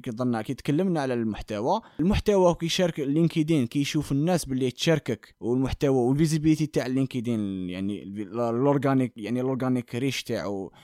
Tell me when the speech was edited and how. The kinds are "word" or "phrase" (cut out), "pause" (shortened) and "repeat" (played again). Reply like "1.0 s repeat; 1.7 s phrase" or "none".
none